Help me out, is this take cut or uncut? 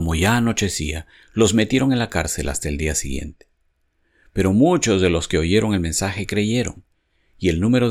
uncut